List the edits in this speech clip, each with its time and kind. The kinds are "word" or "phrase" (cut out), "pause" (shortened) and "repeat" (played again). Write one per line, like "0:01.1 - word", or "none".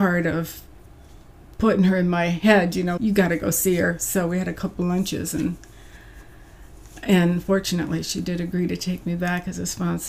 0:03.0 - word